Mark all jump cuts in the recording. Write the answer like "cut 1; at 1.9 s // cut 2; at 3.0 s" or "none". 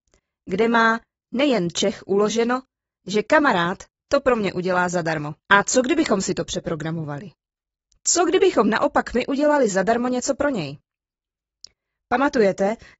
cut 1; at 5.4 s